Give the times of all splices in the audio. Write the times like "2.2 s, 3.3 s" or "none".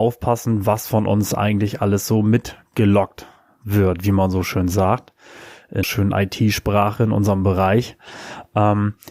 5.8 s